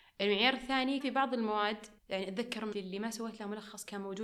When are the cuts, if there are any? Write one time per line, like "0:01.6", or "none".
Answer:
0:01.0
0:02.0
0:02.7